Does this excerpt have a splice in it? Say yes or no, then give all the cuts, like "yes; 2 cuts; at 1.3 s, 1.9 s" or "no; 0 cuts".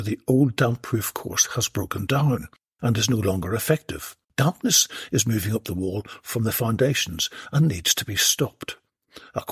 yes; 1 cut; at 4.2 s